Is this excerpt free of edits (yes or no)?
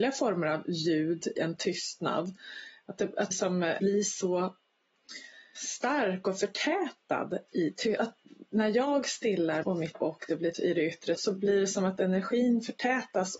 no